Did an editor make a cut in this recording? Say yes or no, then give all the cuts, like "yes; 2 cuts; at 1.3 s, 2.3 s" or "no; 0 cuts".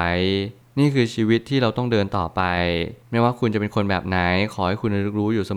no; 0 cuts